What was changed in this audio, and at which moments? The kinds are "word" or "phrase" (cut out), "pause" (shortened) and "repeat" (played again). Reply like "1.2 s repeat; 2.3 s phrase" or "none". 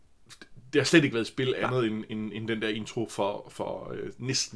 none